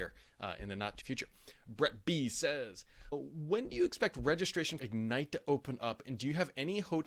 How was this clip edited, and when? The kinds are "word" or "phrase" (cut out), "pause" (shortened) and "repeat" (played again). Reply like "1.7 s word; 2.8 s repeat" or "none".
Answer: 1.0 s word; 3.1 s word; 4.8 s word